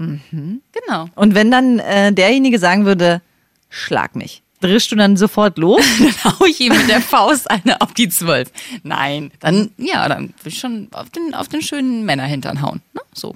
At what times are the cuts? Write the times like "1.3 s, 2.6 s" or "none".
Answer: 4.5 s, 9.3 s